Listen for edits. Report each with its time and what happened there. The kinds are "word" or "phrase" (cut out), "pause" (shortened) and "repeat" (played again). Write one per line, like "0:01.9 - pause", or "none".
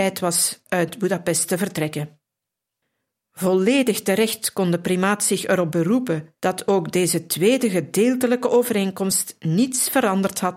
0:02.8 - pause
0:06.4 - pause